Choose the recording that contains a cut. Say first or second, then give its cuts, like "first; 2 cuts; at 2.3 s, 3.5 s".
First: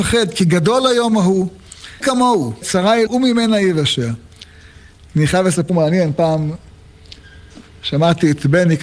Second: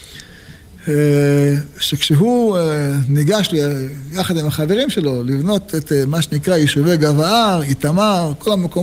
first; 4 cuts; at 2.0 s, 2.6 s, 3.1 s, 5.7 s